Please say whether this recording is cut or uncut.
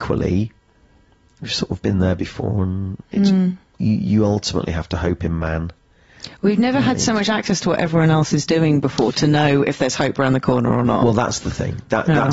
uncut